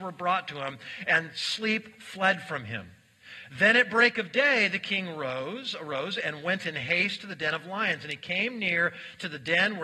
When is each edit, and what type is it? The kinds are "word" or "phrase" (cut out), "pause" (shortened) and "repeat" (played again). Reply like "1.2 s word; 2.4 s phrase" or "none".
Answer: none

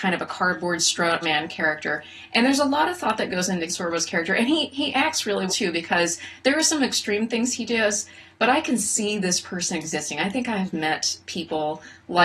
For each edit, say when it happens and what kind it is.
1.2 s word; 3.7 s word; 5.5 s word

